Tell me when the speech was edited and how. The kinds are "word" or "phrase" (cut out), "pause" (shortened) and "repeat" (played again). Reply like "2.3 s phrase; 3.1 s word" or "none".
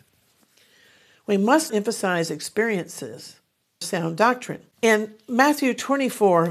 1.7 s word; 3.8 s word; 4.7 s pause